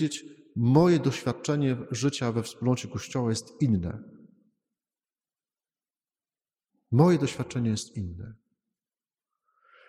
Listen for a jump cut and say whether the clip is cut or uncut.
uncut